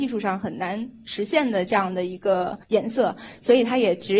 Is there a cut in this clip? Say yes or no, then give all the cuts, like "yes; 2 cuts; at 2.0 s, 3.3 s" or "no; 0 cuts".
yes; 1 cut; at 2.6 s